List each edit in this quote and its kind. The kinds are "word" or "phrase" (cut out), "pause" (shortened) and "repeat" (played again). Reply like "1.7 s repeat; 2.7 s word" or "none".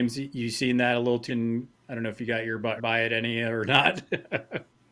1.3 s word; 2.8 s word